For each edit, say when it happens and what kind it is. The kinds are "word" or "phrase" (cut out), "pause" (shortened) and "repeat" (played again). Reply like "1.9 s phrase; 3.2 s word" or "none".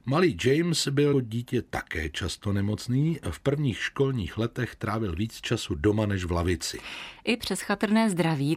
1.1 s word

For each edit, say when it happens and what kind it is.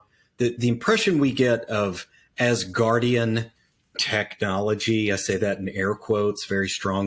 none

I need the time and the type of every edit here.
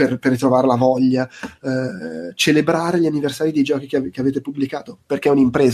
none

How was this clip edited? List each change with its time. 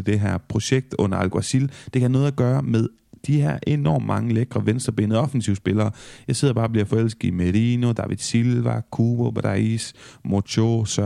none

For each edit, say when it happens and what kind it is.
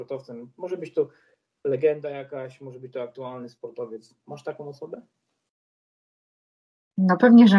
none

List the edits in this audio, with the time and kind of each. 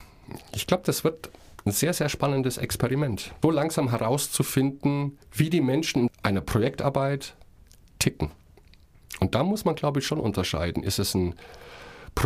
3.4 s word; 5.2 s pause; 6.1 s phrase

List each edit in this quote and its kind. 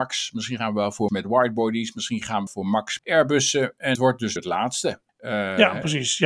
1.1 s word; 2.5 s phrase; 3.0 s word; 3.9 s word; 4.4 s word; 5.1 s pause

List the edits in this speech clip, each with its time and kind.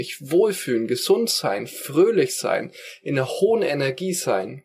none

